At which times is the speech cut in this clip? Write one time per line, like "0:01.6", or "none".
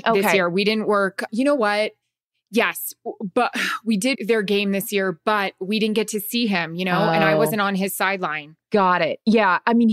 0:04.1